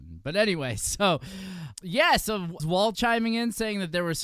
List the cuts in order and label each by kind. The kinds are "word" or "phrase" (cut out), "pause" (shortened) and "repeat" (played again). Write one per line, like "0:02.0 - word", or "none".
0:01.7 - word
0:02.6 - word
0:02.9 - word